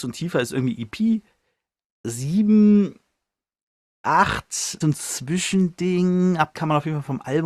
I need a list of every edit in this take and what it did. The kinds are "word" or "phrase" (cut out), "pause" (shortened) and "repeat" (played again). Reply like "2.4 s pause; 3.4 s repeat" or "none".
4.8 s phrase; 6.5 s word